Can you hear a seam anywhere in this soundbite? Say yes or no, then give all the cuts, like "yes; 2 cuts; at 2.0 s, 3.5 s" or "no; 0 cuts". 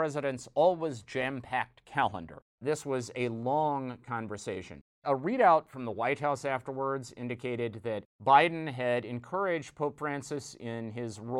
yes; 3 cuts; at 2.5 s, 4.9 s, 8.1 s